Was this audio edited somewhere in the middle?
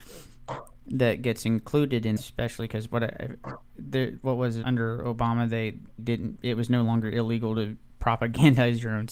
yes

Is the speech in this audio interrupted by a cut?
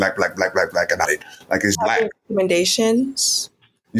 yes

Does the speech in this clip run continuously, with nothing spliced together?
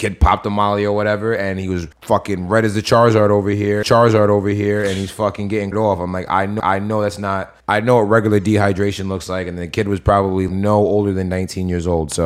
no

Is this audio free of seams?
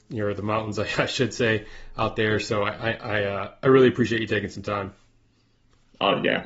yes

